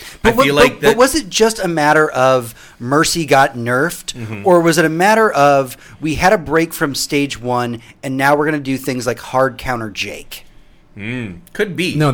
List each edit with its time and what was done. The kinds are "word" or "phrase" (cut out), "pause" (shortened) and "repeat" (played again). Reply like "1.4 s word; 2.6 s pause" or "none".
none